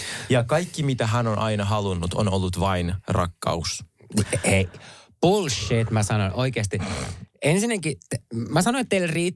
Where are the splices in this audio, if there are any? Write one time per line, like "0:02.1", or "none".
none